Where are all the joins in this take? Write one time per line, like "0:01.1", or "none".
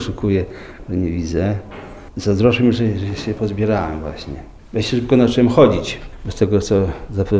0:03.4